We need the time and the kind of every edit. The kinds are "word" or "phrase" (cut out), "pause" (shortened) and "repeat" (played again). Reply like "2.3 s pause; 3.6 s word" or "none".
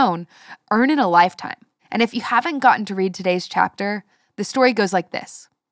1.8 s pause